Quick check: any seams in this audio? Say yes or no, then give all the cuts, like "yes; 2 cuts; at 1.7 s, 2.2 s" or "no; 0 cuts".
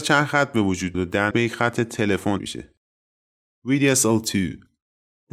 yes; 3 cuts; at 0.9 s, 1.3 s, 2.4 s